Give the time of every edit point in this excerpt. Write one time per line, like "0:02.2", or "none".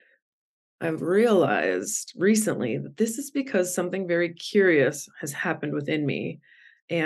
none